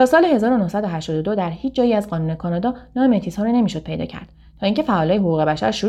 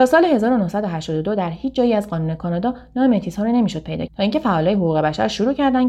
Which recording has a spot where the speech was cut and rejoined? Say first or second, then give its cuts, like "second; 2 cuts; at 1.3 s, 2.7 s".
second; 1 cut; at 4.1 s